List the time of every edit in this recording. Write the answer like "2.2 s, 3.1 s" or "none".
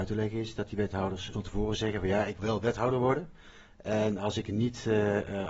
1.3 s, 2.4 s